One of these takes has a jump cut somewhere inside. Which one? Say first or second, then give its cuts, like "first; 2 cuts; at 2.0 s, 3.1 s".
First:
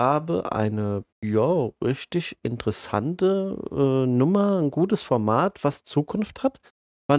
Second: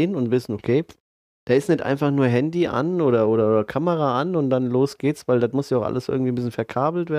first; 1 cut; at 1.1 s